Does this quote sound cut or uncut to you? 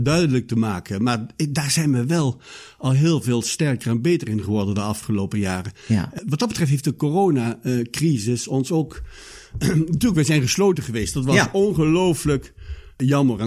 uncut